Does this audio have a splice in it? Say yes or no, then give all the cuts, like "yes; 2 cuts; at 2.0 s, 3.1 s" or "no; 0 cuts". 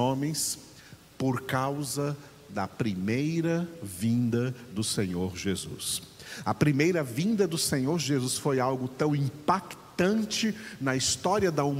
no; 0 cuts